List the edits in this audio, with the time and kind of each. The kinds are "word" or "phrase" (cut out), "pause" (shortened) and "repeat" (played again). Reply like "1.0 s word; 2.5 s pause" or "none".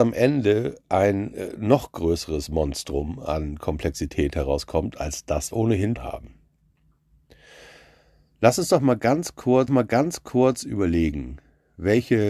5.5 s phrase; 6.0 s word; 9.7 s repeat